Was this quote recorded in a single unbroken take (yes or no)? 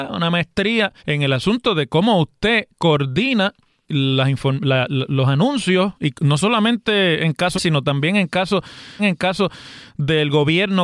no